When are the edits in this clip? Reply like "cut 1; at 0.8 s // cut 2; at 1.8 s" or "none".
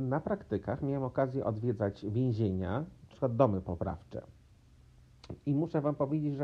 cut 1; at 3.1 s